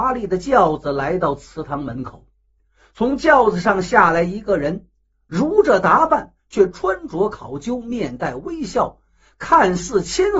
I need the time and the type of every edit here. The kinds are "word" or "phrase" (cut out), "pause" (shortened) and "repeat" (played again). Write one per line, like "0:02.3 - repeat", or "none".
none